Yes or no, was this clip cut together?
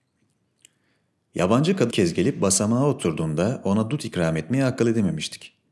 yes